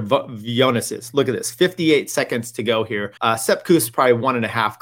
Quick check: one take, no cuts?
no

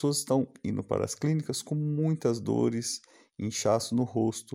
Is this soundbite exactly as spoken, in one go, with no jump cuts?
yes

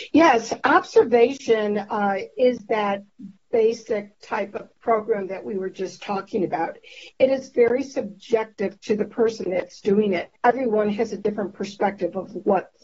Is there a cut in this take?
yes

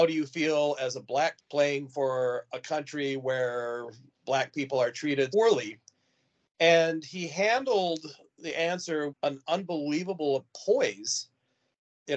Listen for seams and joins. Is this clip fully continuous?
no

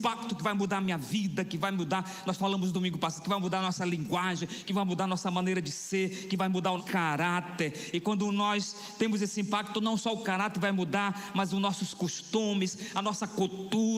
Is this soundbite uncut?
no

